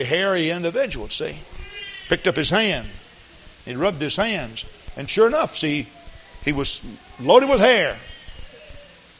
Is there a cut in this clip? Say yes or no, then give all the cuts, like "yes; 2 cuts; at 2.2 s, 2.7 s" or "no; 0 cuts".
no; 0 cuts